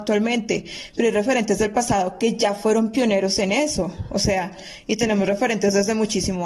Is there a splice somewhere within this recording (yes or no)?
no